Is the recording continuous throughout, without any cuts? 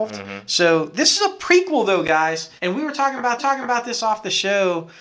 no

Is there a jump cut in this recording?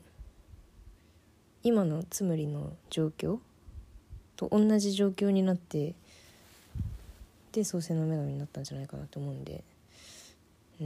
yes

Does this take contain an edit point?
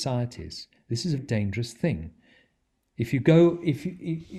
yes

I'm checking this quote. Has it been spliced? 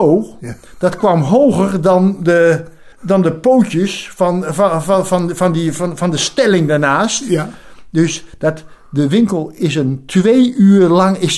yes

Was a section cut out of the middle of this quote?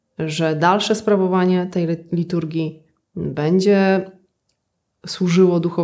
no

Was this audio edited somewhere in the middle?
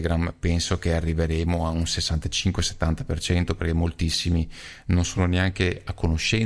no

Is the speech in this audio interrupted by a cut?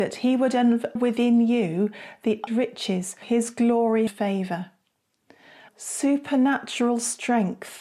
yes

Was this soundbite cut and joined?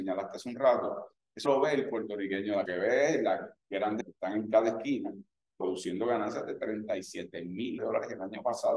yes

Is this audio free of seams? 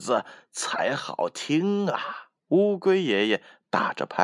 no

